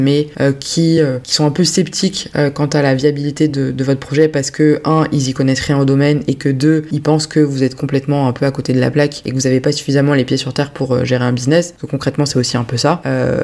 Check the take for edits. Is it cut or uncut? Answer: uncut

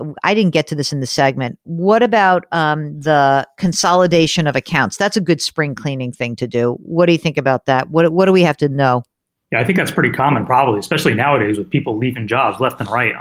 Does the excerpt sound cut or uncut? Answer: uncut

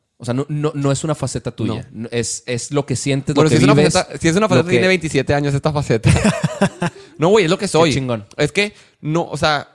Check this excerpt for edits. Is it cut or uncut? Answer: uncut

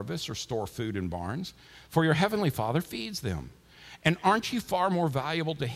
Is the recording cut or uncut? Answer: uncut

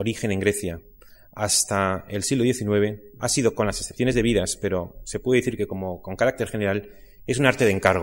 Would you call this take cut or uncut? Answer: uncut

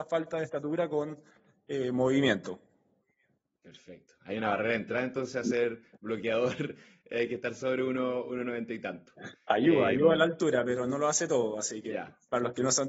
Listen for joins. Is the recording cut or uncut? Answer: uncut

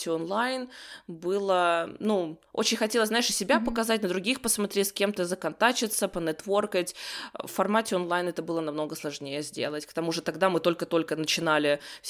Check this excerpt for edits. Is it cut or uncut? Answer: uncut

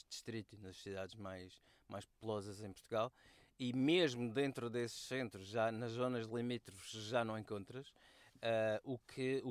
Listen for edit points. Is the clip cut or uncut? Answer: uncut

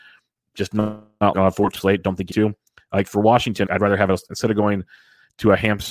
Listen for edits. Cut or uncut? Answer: cut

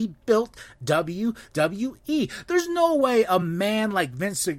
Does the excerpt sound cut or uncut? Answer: uncut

